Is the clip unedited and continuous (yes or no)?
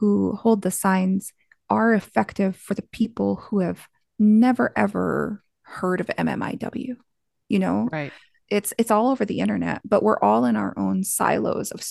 yes